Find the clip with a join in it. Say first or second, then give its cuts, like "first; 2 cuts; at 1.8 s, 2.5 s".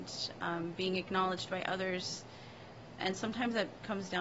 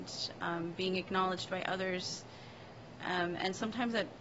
first; 1 cut; at 3.0 s